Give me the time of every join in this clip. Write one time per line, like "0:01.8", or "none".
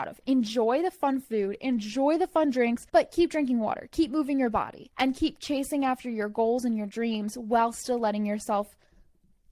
0:02.9
0:04.9